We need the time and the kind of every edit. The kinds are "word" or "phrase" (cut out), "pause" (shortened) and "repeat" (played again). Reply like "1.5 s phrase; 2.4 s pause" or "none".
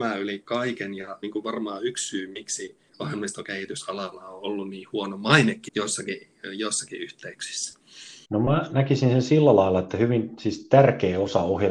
1.2 s phrase; 2.9 s pause; 5.7 s word; 8.2 s pause